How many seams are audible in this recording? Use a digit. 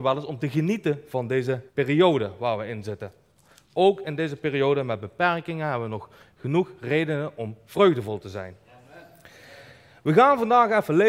1